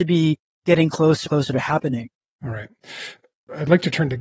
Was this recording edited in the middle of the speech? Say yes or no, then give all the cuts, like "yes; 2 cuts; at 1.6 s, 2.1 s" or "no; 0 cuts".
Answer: yes; 1 cut; at 1.3 s